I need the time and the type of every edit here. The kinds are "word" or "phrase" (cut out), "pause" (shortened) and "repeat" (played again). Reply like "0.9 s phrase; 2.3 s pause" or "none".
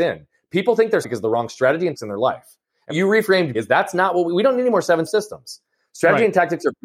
1.0 s word; 1.9 s word; 2.9 s word; 3.5 s word; 5.1 s word